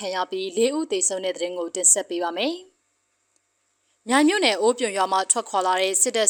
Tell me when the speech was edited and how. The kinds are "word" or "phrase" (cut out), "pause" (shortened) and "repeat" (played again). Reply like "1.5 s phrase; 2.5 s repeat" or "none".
none